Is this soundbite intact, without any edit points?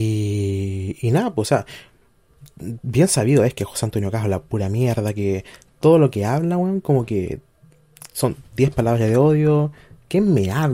yes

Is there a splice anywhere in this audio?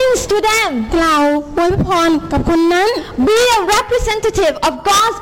no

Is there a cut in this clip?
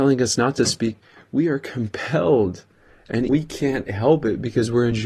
yes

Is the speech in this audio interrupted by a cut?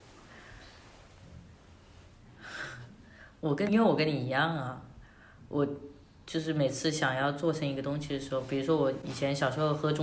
yes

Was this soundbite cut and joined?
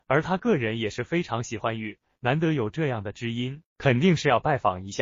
yes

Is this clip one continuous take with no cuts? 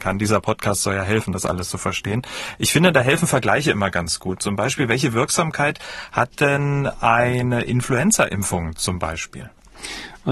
yes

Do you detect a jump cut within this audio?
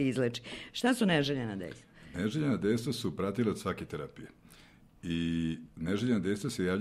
no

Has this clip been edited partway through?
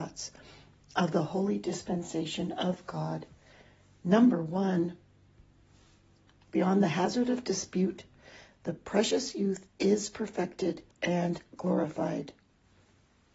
yes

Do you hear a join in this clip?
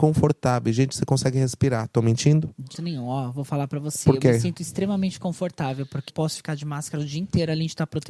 yes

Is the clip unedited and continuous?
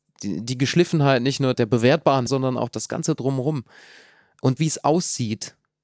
no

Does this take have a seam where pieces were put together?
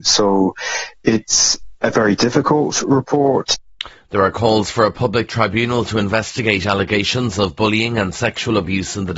no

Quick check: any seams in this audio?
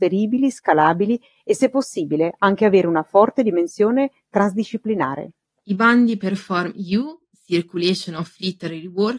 no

